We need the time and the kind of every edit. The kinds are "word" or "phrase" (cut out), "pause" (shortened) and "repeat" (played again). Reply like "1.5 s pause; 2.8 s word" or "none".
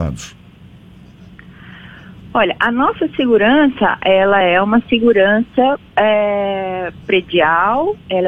none